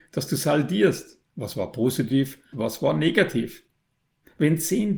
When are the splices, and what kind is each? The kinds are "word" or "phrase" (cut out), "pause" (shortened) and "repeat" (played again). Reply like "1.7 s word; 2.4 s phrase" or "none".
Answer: 1.3 s pause; 2.5 s word